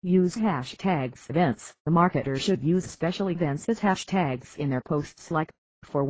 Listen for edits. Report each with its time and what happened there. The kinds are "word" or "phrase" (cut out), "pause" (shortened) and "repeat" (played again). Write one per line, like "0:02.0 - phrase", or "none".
0:01.3 - word
0:01.8 - pause